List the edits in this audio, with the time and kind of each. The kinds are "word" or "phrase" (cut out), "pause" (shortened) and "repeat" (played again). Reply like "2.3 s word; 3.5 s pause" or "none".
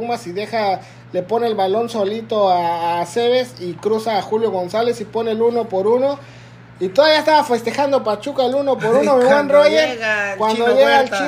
none